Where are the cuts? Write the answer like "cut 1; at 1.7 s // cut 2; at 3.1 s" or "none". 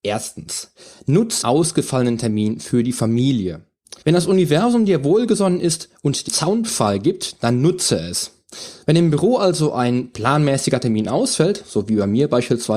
cut 1; at 1.4 s // cut 2; at 4.0 s // cut 3; at 6.3 s